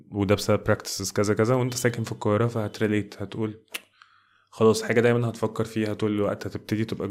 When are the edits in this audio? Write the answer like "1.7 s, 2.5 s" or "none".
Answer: none